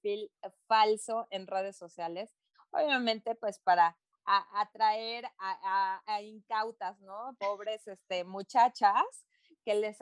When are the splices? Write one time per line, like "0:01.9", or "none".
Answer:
none